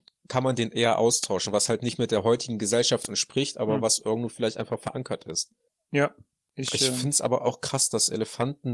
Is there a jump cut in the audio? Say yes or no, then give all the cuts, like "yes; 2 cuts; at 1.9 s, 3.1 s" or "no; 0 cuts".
no; 0 cuts